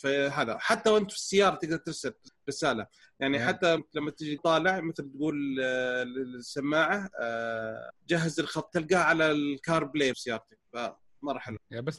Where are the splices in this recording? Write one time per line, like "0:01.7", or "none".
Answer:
0:03.8
0:04.4
0:08.7
0:10.1